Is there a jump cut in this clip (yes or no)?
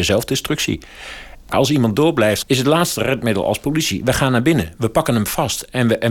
yes